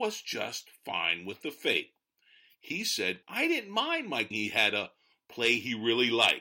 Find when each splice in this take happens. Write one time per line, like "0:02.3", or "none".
0:03.2
0:04.3